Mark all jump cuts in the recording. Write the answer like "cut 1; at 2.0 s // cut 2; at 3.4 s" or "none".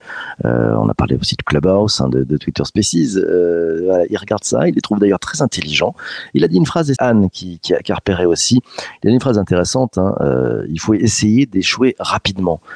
cut 1; at 7.0 s